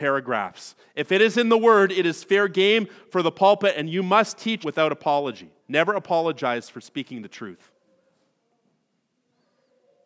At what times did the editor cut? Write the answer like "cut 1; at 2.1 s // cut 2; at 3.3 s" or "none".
cut 1; at 4.6 s // cut 2; at 5.6 s